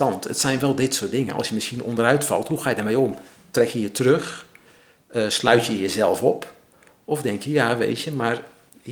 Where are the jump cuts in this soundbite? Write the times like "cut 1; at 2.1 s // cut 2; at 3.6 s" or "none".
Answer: none

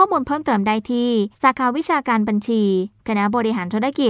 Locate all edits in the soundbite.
cut 1; at 1.3 s

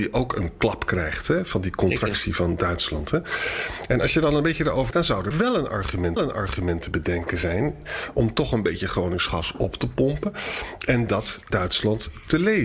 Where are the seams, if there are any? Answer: cut 1; at 4.9 s // cut 2; at 5.3 s // cut 3; at 6.2 s // cut 4; at 11.5 s

